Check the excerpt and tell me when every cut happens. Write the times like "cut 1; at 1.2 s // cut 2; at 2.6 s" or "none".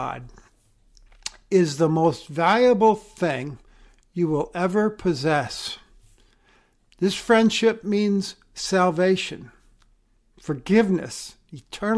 none